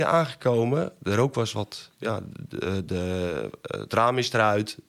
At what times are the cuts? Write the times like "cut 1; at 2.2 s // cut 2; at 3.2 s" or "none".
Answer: none